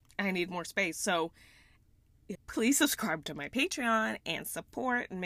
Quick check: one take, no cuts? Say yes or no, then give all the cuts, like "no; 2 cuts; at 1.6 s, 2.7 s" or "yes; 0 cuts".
no; 1 cut; at 2.3 s